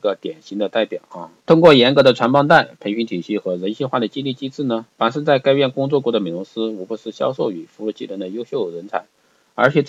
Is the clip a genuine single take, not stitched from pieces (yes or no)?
no